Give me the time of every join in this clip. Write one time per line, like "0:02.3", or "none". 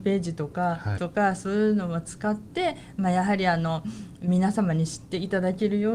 0:01.0